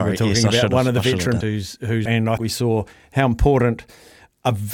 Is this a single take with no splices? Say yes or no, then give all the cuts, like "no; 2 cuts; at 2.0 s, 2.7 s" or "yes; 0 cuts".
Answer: no; 3 cuts; at 1.4 s, 2.1 s, 2.4 s